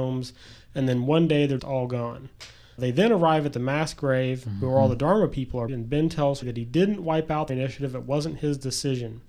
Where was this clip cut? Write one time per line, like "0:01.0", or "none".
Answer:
0:01.6
0:02.8
0:05.7
0:06.4
0:07.5